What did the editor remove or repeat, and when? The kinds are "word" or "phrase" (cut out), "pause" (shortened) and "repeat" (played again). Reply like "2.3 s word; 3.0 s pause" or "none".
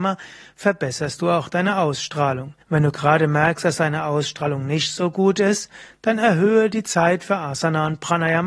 2.6 s pause